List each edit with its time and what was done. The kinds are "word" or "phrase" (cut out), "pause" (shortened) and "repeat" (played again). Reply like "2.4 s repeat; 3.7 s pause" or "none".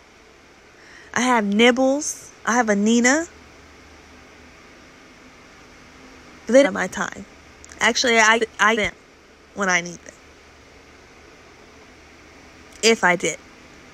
2.4 s pause; 6.6 s phrase; 8.4 s word; 8.7 s word